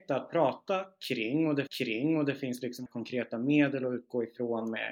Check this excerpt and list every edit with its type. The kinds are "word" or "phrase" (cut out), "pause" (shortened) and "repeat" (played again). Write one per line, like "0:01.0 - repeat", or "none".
0:01.7 - repeat
0:02.9 - word